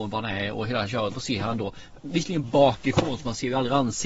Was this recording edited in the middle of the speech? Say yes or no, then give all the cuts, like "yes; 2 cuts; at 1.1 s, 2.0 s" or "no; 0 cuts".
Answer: yes; 2 cuts; at 1.1 s, 2.4 s